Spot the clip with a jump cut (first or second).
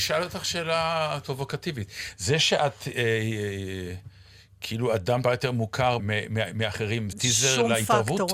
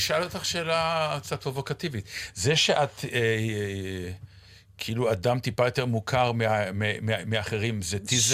first